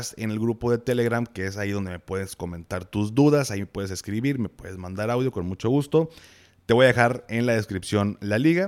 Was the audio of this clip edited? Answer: no; 0 cuts

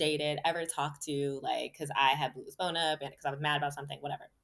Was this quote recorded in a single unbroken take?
yes; 0 cuts

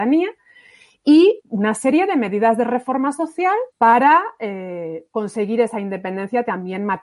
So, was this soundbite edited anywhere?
yes; 2 cuts; at 1.4 s, 3.7 s

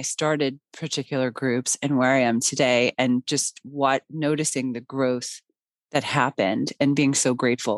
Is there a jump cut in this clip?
no; 0 cuts

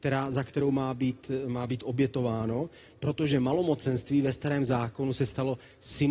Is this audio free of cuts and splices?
yes; 0 cuts

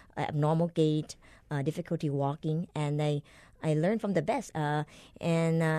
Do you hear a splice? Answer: yes; 1 cut; at 4.5 s

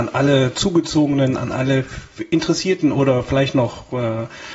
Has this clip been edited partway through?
no; 0 cuts

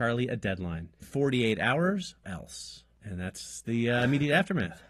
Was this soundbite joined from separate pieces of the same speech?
yes; 2 cuts; at 1.0 s, 2.2 s

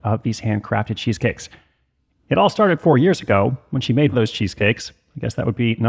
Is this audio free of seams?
no; 1 cut; at 4.1 s

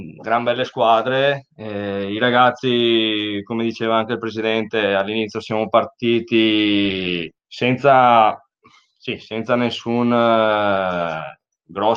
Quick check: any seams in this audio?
yes; 1 cut; at 7.4 s

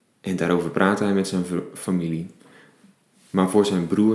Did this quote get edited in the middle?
no; 0 cuts

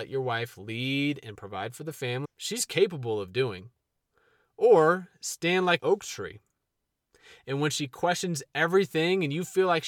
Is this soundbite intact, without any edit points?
no; 2 cuts; at 2.2 s, 5.8 s

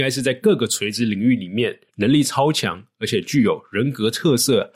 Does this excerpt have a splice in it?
yes; 1 cut; at 1.9 s

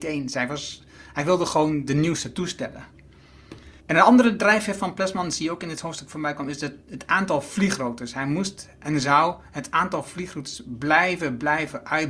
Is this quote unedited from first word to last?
no; 1 cut; at 3.8 s

